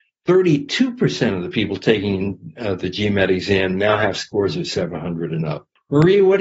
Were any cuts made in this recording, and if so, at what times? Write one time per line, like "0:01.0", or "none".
none